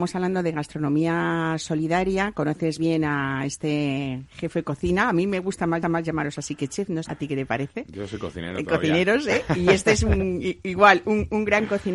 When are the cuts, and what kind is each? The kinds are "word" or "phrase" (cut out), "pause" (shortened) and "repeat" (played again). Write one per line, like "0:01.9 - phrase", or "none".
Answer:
0:02.8 - word
0:05.8 - repeat
0:07.0 - phrase